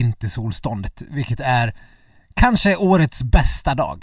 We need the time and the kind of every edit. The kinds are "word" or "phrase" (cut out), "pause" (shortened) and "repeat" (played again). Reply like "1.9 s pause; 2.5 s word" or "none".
none